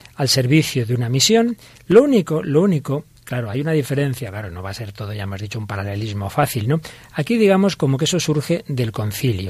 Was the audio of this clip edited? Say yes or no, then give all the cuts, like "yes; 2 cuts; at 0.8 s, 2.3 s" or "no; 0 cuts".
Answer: no; 0 cuts